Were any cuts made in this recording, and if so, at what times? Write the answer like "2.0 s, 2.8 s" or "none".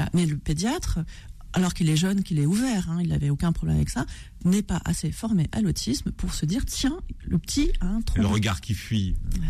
none